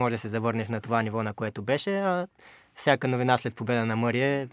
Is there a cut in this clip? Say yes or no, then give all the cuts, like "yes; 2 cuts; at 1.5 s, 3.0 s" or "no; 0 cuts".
no; 0 cuts